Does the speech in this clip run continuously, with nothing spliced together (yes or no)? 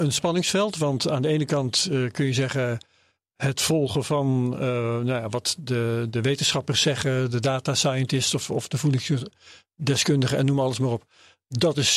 yes